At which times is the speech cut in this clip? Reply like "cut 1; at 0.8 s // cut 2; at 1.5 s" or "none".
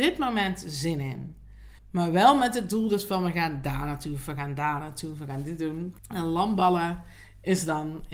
cut 1; at 1.8 s // cut 2; at 6.0 s